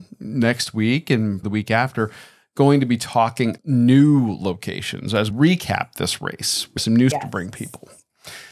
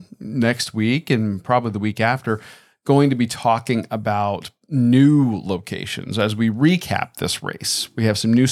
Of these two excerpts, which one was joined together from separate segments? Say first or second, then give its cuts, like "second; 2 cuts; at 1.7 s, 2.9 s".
first; 5 cuts; at 1.4 s, 3.6 s, 5.3 s, 6.8 s, 7.1 s